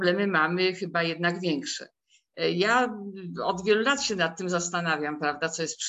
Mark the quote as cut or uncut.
uncut